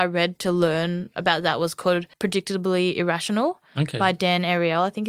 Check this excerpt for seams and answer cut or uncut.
cut